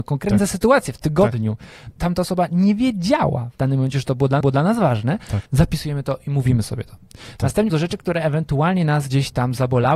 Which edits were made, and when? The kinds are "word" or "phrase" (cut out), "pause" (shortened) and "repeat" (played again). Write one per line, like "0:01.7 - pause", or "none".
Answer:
0:01.9 - phrase
0:04.4 - repeat
0:05.5 - pause
0:07.7 - word

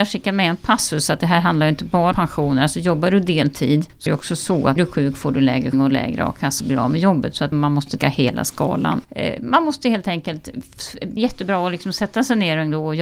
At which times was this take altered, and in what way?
0:02.1 - word
0:04.1 - word
0:04.8 - word
0:05.7 - word
0:06.6 - word
0:07.5 - word
0:08.0 - word
0:11.2 - word

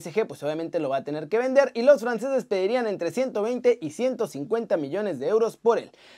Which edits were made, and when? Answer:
none

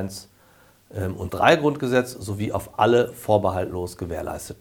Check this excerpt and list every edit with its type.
0:01.3 - word

